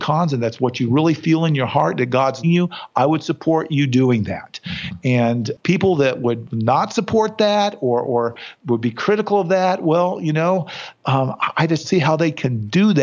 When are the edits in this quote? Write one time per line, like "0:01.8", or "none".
0:02.4
0:11.0
0:11.8